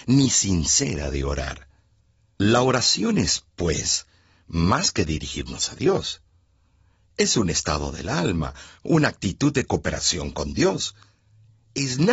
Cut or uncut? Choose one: uncut